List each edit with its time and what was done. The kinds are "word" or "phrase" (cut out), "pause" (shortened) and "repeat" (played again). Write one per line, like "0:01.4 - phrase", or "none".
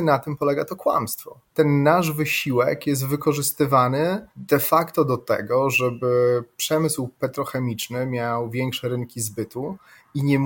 0:01.5 - pause
0:04.3 - pause